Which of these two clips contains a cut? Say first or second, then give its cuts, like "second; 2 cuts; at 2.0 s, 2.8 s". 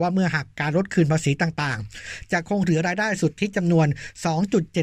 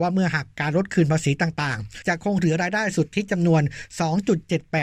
second; 1 cut; at 2.0 s